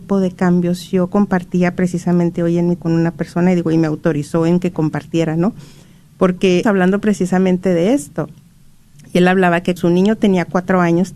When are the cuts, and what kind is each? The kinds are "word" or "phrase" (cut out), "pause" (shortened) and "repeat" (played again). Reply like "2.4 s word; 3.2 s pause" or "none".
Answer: 2.8 s word; 6.6 s word; 9.8 s word

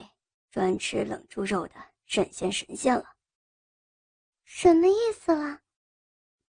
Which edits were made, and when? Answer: none

